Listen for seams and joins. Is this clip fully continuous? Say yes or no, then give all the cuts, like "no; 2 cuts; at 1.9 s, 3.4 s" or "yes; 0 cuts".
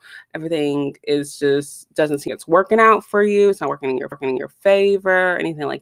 no; 2 cuts; at 2.3 s, 4.1 s